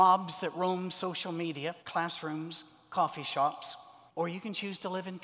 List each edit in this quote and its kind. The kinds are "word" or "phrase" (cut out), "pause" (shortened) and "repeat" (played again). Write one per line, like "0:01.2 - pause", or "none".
0:01.8 - pause
0:04.1 - pause